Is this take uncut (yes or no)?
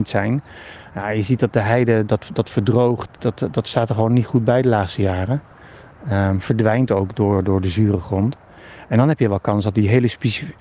yes